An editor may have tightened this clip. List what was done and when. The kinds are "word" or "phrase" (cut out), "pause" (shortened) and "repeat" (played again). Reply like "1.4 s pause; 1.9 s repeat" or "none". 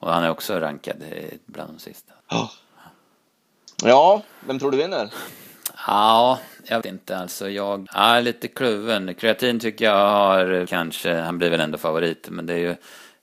2.2 s pause; 6.8 s word; 7.9 s word; 10.7 s phrase